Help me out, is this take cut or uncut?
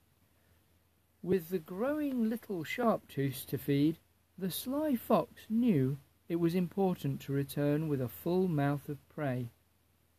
uncut